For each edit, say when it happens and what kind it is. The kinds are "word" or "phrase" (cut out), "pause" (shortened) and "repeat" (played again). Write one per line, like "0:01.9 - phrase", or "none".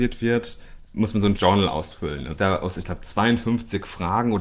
0:01.4 - word
0:02.4 - phrase